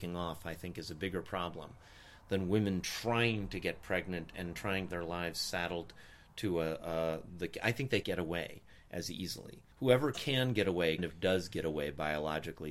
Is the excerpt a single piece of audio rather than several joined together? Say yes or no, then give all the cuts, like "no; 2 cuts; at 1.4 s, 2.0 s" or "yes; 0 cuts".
no; 4 cuts; at 4.9 s, 8.0 s, 9.7 s, 11.0 s